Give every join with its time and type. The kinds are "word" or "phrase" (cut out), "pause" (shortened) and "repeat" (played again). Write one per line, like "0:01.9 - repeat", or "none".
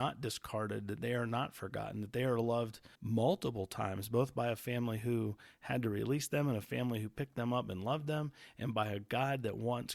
0:02.9 - pause